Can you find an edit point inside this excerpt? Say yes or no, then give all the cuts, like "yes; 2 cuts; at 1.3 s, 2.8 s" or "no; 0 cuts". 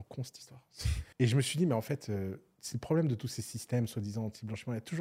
yes; 1 cut; at 1.1 s